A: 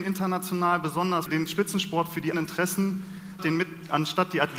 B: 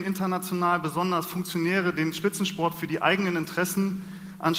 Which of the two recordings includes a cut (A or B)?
A